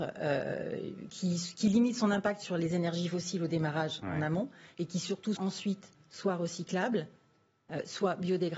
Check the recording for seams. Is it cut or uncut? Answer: cut